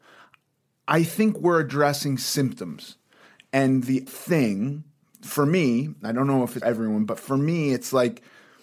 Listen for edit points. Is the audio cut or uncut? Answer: cut